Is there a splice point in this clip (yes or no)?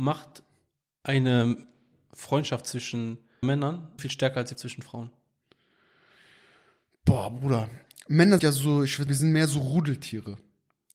yes